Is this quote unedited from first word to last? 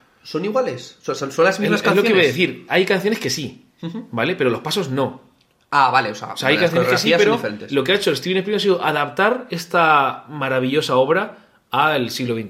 yes; 0 cuts

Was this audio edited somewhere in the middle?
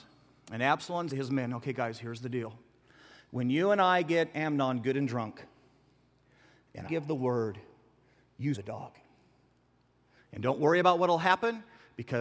yes; 3 cuts; at 1.1 s, 6.8 s, 8.5 s

